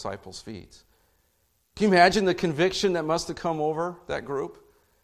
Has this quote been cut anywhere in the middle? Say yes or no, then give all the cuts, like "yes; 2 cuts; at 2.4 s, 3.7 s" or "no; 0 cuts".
no; 0 cuts